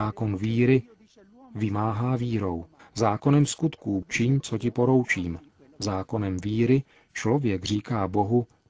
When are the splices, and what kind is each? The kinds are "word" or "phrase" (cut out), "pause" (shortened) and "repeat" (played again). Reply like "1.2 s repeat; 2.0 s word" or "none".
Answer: 2.8 s pause; 4.0 s phrase

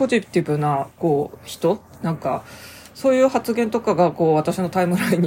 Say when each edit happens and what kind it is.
none

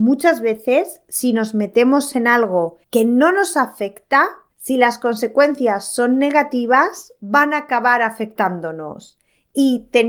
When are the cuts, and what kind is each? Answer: 2.8 s pause; 4.5 s pause

